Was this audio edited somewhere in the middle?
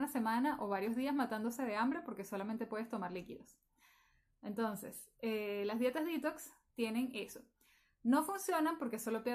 no; 0 cuts

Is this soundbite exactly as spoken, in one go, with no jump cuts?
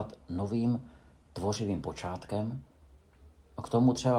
yes; 0 cuts

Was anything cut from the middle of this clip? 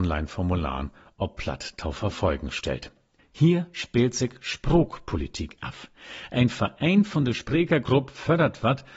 no; 0 cuts

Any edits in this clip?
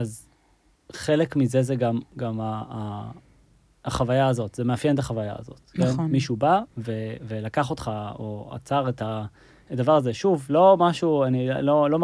no; 0 cuts

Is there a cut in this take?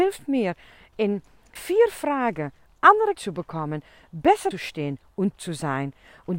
yes; 4 cuts; at 1.6 s, 3.1 s, 4.5 s, 5.4 s

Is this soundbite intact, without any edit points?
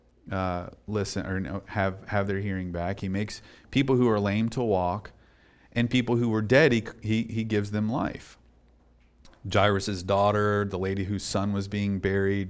yes; 0 cuts

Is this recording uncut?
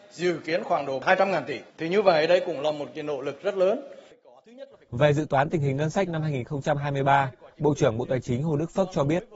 no; 1 cut; at 1.7 s

